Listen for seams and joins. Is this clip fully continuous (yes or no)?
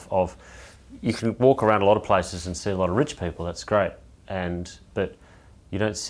yes